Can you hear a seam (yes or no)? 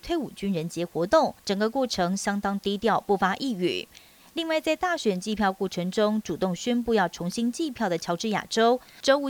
yes